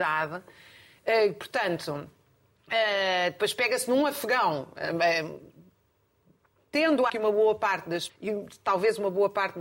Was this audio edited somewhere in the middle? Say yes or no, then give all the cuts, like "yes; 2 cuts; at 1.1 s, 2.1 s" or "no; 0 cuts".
yes; 2 cuts; at 7.1 s, 8.1 s